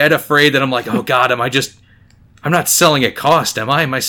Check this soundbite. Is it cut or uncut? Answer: uncut